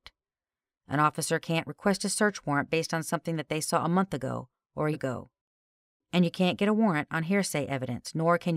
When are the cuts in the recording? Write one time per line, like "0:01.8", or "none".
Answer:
0:04.9